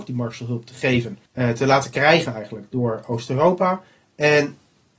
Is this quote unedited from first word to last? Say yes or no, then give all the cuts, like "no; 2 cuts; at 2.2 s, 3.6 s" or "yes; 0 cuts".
no; 1 cut; at 1.3 s